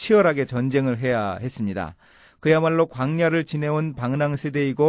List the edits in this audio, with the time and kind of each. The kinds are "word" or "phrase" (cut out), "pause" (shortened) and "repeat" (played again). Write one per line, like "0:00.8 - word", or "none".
none